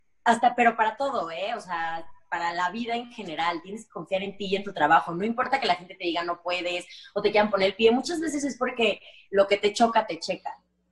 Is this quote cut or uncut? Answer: uncut